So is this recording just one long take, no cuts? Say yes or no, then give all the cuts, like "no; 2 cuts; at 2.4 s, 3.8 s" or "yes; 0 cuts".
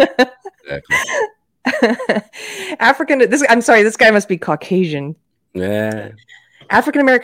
yes; 0 cuts